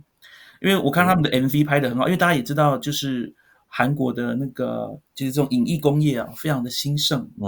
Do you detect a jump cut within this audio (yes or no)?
no